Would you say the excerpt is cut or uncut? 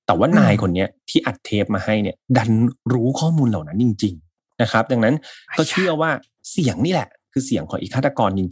uncut